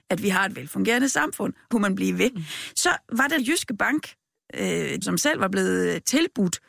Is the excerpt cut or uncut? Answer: cut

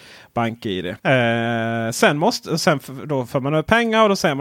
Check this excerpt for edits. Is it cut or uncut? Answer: cut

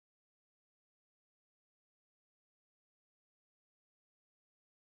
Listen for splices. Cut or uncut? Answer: uncut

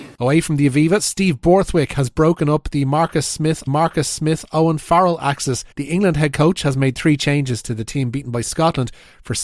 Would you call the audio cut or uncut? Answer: cut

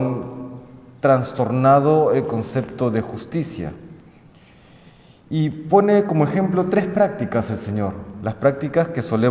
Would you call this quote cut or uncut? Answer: uncut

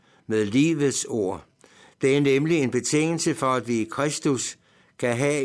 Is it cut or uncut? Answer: cut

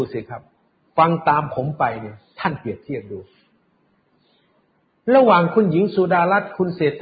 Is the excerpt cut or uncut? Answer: uncut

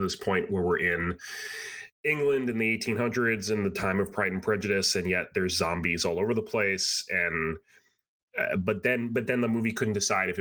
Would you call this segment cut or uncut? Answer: uncut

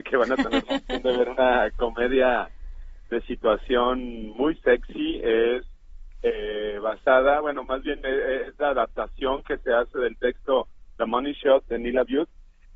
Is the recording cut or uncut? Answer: uncut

